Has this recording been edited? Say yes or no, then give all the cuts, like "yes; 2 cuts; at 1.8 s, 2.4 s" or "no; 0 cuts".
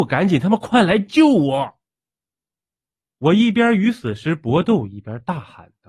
no; 0 cuts